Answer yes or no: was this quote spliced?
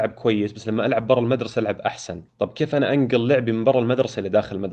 yes